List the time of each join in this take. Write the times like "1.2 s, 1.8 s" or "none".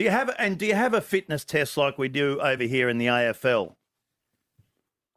none

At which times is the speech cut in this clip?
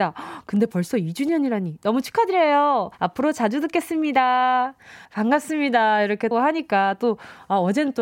2.9 s, 5.0 s, 6.3 s

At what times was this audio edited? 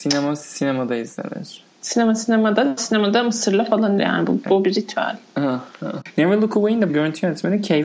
2.8 s, 4.0 s, 5.7 s, 6.9 s

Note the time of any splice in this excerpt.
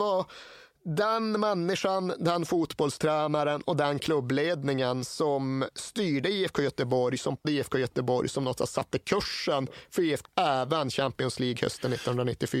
7.4 s, 10.2 s

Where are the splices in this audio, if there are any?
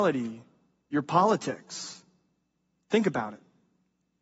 none

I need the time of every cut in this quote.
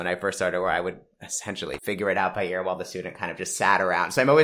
1.8 s

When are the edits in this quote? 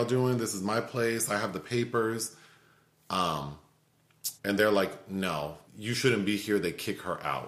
4.4 s, 5.7 s

